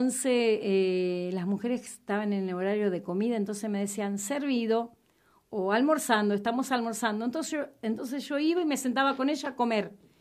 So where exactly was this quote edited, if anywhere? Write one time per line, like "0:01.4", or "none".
none